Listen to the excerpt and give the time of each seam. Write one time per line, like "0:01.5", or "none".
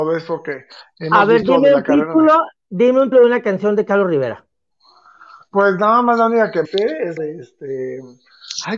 0:03.1
0:06.6
0:07.2